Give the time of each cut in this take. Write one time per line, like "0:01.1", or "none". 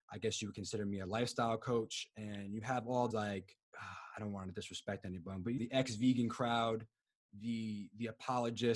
0:03.1
0:03.6
0:05.6